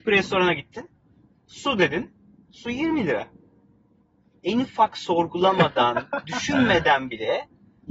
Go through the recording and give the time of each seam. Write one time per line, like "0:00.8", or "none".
none